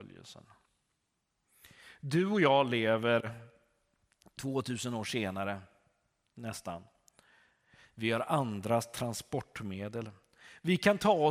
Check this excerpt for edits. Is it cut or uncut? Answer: uncut